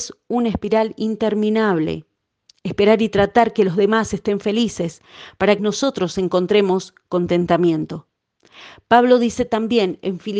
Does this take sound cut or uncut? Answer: cut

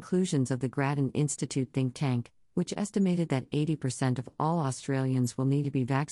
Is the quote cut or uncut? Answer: uncut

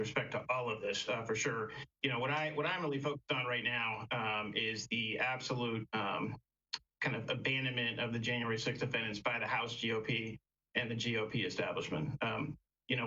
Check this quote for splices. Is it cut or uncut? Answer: uncut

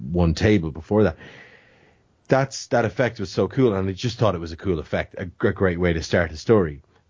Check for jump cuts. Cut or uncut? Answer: uncut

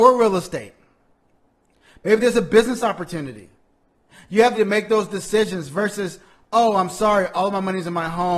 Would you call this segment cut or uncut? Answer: cut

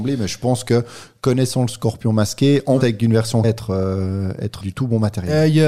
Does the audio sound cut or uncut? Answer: cut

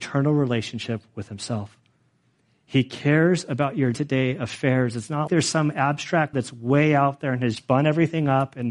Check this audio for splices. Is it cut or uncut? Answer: cut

